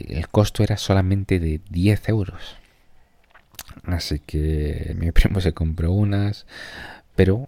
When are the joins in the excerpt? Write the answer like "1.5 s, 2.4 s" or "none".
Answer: 4.9 s